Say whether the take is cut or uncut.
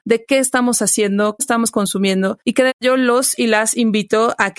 cut